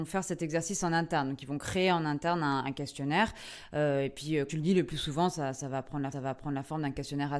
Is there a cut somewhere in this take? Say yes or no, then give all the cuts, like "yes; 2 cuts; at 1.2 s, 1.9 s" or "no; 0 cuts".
yes; 2 cuts; at 4.5 s, 6.1 s